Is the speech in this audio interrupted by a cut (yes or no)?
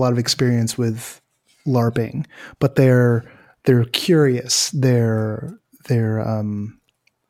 no